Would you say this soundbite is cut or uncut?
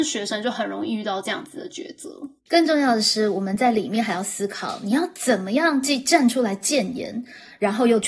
cut